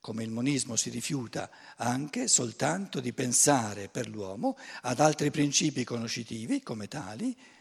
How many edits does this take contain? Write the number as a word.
zero